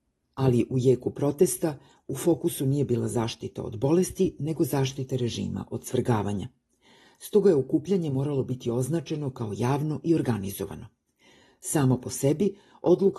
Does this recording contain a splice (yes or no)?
no